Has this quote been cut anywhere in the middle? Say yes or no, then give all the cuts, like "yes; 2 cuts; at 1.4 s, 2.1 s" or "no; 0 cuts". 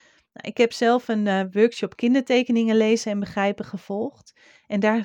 no; 0 cuts